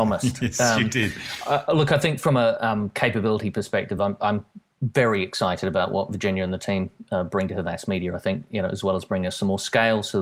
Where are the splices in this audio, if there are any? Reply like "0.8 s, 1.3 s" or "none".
none